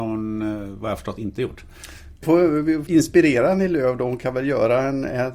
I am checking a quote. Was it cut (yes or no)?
yes